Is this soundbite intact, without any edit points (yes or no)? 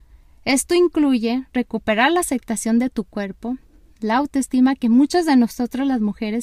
yes